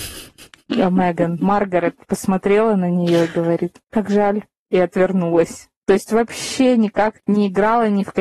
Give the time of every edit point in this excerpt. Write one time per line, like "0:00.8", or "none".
0:02.0
0:05.7